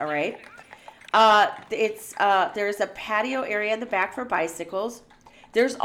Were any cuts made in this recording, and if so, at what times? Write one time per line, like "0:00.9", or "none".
none